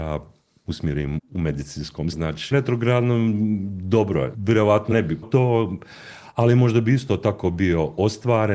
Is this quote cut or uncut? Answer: cut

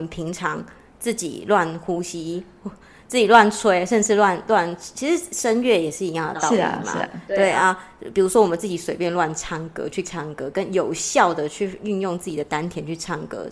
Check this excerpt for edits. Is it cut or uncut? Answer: cut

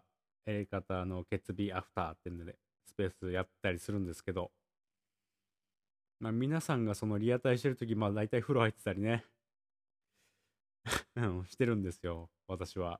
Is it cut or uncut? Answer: uncut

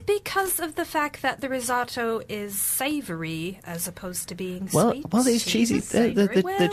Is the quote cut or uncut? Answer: uncut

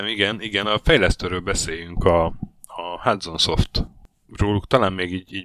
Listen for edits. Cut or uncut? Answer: uncut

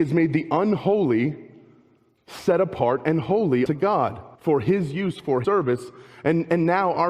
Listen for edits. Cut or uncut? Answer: cut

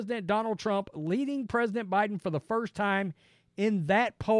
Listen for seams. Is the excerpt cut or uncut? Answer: uncut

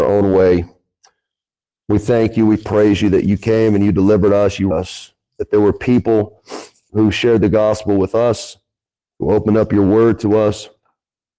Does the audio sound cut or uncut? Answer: cut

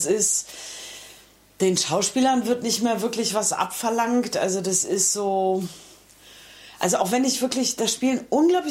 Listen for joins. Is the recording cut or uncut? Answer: uncut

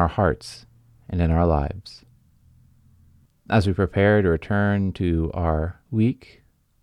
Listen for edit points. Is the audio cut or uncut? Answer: cut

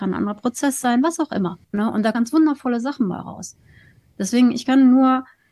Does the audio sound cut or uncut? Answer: cut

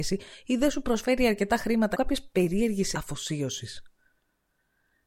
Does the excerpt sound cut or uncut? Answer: cut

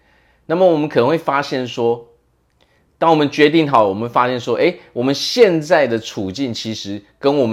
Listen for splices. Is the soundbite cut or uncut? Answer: uncut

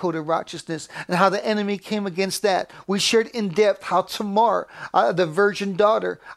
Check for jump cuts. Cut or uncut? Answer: uncut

